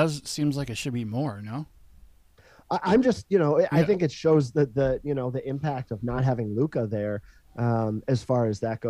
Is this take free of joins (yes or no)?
yes